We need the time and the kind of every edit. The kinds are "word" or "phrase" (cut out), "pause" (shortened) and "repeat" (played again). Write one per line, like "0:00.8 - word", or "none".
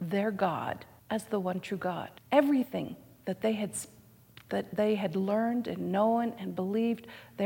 0:01.0 - pause
0:02.2 - pause